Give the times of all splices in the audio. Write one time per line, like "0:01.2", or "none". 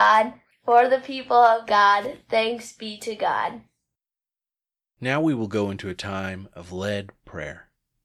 none

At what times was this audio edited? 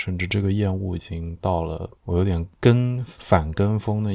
0:02.0

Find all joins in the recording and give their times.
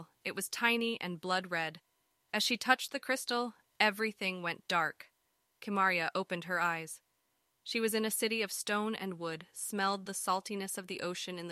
none

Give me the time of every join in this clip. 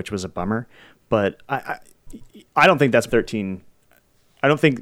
0:02.5
0:03.1

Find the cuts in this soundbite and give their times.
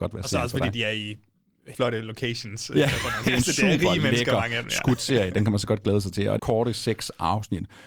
0:01.7
0:03.2
0:06.4

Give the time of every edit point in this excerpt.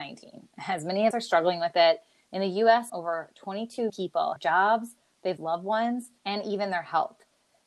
0:01.1
0:02.9
0:03.9
0:04.4
0:05.4
0:06.2

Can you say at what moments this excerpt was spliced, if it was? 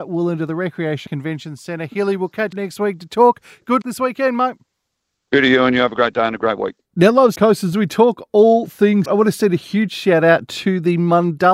0:01.1
0:02.5
0:03.8
0:07.4
0:07.7
0:09.1

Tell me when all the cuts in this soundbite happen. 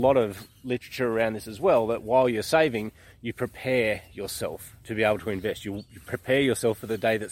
none

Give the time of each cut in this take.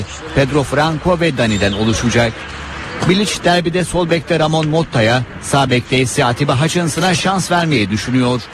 none

